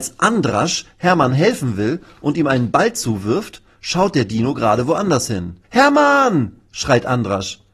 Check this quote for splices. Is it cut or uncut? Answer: cut